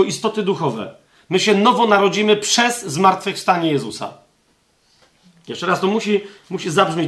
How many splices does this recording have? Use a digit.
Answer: 0